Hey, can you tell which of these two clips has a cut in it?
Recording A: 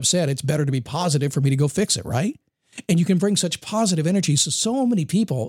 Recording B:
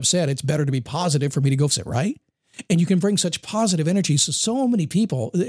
B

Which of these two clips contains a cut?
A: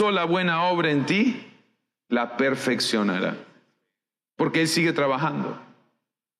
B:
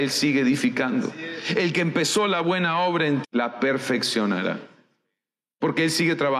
B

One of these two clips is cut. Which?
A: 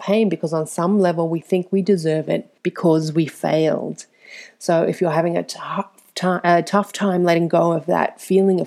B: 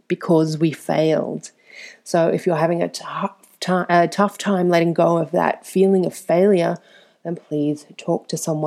A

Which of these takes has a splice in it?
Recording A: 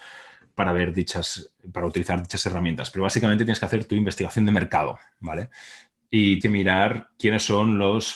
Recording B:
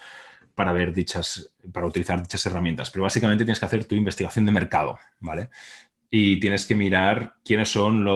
A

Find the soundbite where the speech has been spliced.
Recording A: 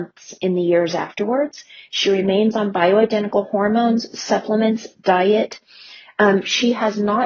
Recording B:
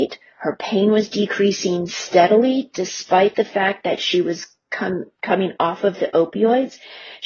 B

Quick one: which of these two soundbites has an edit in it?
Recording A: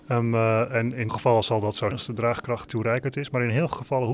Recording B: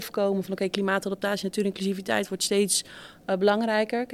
A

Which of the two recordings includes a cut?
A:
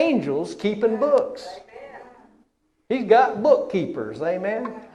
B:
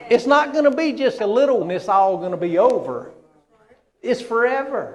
B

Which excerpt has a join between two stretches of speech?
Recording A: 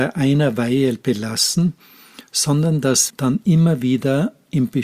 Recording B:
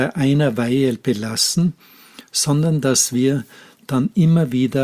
A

